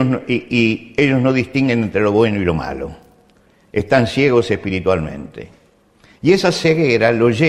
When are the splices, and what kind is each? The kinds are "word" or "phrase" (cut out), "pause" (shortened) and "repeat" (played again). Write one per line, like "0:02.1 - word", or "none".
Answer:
none